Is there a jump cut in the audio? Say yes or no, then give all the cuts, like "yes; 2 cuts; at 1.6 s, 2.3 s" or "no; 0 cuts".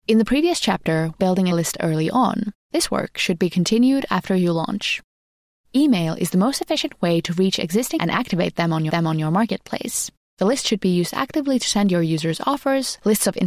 yes; 5 cuts; at 1.2 s, 1.5 s, 2.6 s, 8.0 s, 8.9 s